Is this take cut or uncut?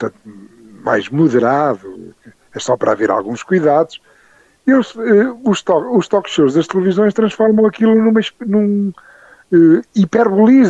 uncut